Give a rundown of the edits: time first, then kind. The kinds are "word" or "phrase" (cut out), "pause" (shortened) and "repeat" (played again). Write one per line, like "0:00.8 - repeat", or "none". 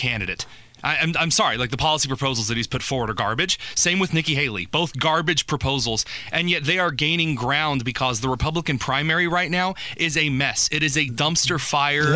none